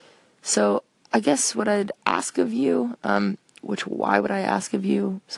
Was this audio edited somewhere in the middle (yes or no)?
no